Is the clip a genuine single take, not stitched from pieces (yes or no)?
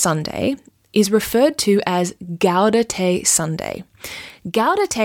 yes